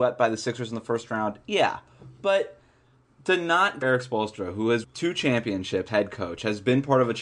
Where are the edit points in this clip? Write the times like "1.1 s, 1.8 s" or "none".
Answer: 3.8 s, 4.8 s, 5.9 s